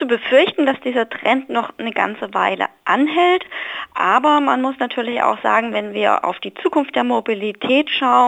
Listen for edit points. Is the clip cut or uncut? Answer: uncut